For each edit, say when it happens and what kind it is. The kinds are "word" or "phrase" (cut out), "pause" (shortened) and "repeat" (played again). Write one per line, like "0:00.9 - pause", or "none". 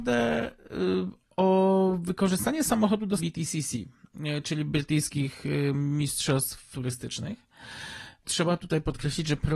0:03.2 - word
0:06.7 - word
0:08.2 - word